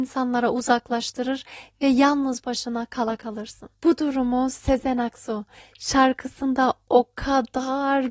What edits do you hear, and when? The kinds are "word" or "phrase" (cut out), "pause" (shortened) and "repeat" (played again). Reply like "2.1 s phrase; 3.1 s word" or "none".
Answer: none